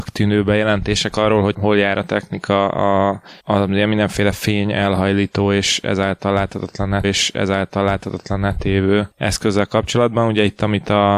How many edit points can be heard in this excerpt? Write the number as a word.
four